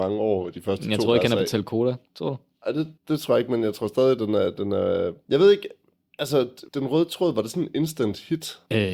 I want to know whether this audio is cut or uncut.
cut